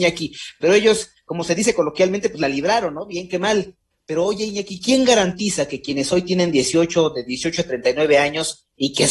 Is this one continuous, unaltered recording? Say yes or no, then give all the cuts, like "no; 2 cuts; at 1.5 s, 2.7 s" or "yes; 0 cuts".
yes; 0 cuts